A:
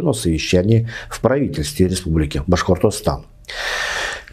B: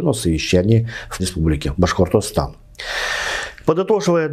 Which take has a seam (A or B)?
B